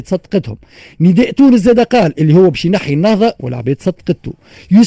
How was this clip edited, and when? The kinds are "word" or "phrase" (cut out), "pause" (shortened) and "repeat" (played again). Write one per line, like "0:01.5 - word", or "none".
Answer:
none